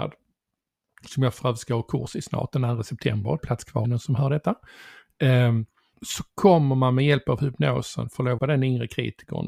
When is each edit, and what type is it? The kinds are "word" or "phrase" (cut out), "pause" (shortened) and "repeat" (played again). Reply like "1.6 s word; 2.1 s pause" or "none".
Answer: 3.4 s phrase; 3.8 s phrase; 5.9 s word; 8.4 s phrase

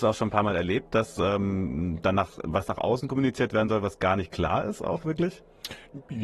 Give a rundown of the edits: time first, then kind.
none

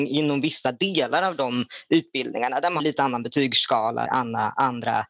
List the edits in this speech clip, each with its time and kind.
2.8 s word; 4.1 s word

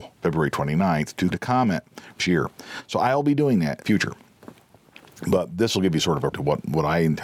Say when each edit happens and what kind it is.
1.3 s word; 2.2 s word; 3.8 s phrase; 6.3 s word

